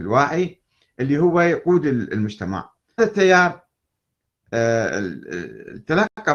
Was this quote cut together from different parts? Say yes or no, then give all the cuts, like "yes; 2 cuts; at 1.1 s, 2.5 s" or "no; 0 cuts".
yes; 1 cut; at 3.0 s